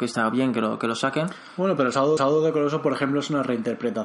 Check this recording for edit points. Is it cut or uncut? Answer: cut